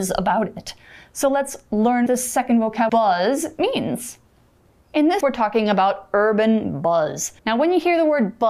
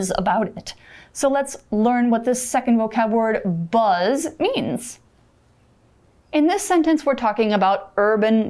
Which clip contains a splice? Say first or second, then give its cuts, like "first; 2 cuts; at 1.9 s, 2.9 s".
first; 5 cuts; at 2.1 s, 2.9 s, 4.6 s, 5.2 s, 7.4 s